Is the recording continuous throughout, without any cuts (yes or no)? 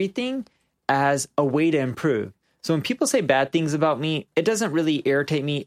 yes